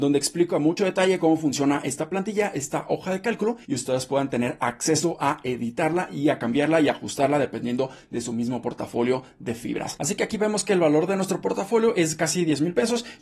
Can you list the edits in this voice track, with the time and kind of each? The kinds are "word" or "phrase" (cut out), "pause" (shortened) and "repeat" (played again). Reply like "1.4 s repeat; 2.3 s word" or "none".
3.6 s pause